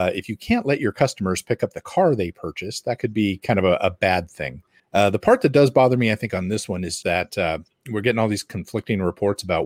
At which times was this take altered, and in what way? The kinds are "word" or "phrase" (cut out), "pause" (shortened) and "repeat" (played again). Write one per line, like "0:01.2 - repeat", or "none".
0:04.8 - pause
0:07.0 - word